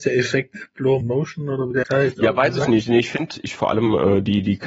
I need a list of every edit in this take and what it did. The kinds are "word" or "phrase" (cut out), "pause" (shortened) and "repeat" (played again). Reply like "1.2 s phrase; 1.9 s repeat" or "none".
1.0 s word; 1.8 s word; 3.6 s phrase